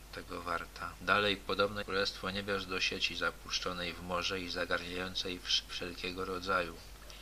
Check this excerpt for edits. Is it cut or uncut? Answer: cut